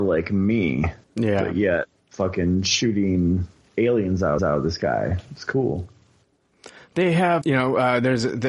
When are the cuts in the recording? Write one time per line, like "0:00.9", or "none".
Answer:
0:01.0
0:02.0
0:04.4
0:07.4